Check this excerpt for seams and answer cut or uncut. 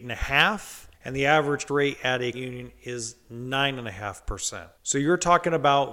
cut